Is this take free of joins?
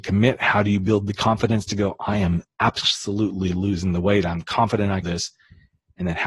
no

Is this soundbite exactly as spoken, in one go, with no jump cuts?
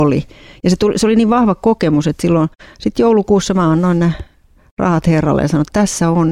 yes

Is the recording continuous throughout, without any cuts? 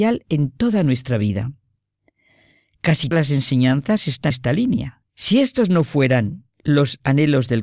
no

